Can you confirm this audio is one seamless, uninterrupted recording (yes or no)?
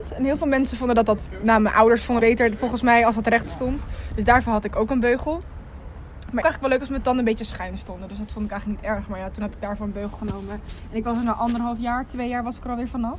no